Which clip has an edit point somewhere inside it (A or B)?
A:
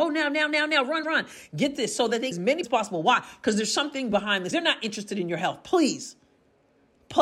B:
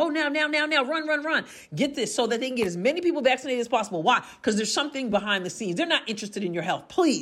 A